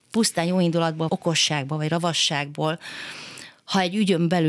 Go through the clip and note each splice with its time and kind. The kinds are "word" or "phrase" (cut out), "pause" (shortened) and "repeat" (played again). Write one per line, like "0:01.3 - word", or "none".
0:01.1 - word